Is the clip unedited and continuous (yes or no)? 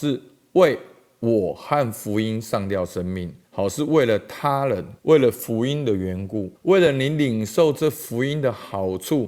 no